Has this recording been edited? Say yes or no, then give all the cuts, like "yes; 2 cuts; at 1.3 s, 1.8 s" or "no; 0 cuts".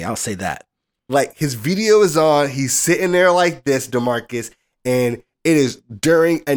no; 0 cuts